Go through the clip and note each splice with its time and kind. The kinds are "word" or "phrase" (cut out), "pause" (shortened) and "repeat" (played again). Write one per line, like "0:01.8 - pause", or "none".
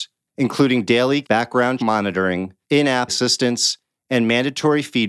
0:01.2 - word
0:01.8 - word
0:02.6 - pause
0:03.1 - word